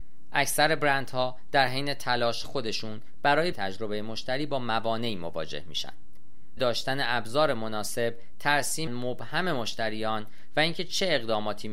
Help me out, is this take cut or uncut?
cut